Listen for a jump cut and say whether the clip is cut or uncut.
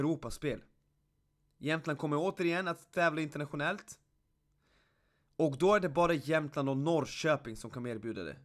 uncut